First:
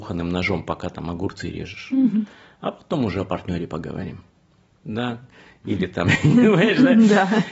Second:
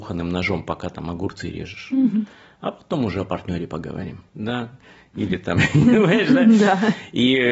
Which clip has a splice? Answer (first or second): second